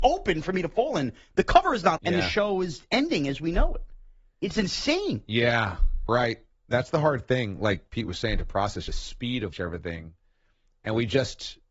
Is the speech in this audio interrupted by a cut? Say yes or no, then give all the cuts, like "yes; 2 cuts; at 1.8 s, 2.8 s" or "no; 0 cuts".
yes; 4 cuts; at 2.0 s, 6.1 s, 8.9 s, 9.5 s